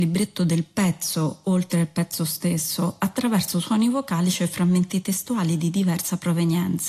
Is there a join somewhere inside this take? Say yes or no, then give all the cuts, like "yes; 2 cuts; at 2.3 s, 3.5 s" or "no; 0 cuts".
no; 0 cuts